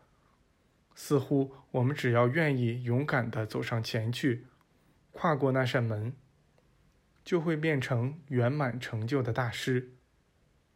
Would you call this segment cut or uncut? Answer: uncut